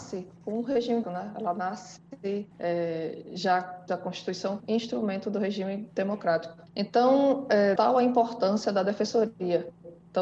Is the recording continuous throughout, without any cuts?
no; 6 cuts; at 1.0 s, 2.5 s, 3.9 s, 4.6 s, 6.7 s, 7.8 s

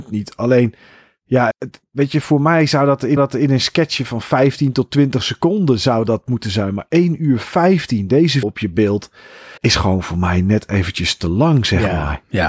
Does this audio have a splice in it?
yes; 4 cuts; at 1.5 s, 3.2 s, 8.4 s, 9.6 s

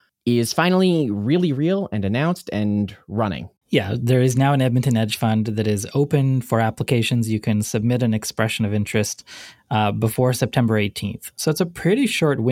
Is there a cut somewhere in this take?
no; 0 cuts

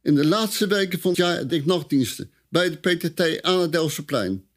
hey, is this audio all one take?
no; 2 cuts; at 1.1 s, 1.5 s

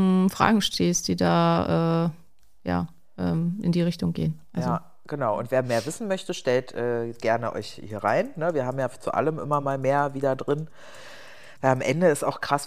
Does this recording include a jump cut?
no; 0 cuts

